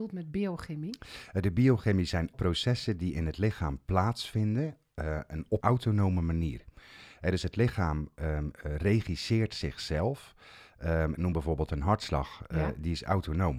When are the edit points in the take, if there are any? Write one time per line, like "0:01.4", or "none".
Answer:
0:02.3
0:05.6
0:11.1

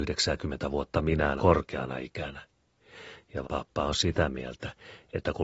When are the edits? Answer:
0:01.4
0:03.4

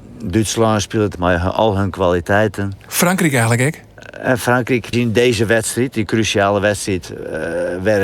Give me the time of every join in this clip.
0:01.1
0:04.9

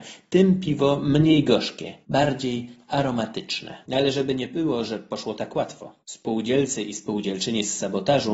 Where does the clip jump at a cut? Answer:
0:02.0
0:03.8
0:06.0

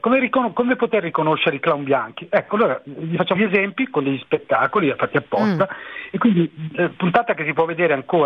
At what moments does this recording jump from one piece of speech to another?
0:03.4

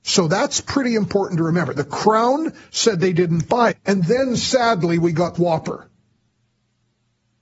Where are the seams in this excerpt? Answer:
0:03.7
0:05.4

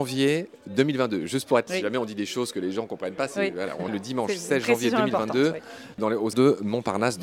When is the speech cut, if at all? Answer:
0:01.7
0:03.9
0:06.3

